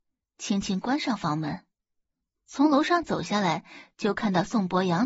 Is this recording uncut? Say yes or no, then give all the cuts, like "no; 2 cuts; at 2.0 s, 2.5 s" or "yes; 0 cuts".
no; 1 cut; at 2.2 s